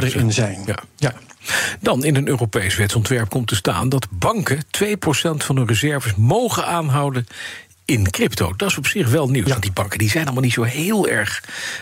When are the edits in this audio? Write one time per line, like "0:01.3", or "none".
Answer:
none